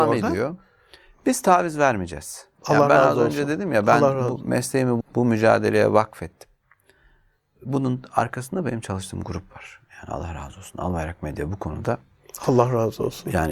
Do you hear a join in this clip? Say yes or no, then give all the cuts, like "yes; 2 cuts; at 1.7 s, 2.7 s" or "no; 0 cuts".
yes; 1 cut; at 5.0 s